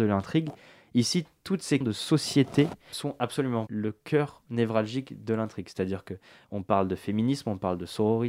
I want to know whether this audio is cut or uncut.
cut